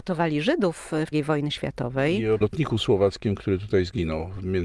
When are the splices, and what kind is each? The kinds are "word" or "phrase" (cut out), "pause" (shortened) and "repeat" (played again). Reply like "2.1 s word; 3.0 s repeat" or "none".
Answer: 1.1 s word; 2.4 s word